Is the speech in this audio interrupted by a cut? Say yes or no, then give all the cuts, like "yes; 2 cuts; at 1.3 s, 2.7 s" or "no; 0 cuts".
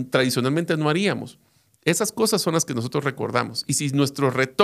no; 0 cuts